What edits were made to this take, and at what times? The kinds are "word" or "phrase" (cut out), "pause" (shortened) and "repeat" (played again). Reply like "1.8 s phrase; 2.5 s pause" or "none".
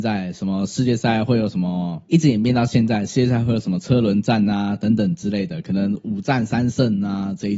2.1 s pause